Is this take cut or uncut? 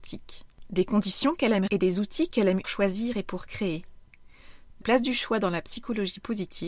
cut